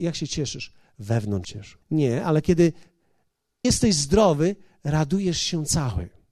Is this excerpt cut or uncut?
cut